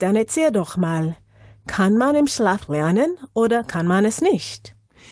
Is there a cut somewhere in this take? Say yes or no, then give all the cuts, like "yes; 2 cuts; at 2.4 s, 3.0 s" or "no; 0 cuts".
no; 0 cuts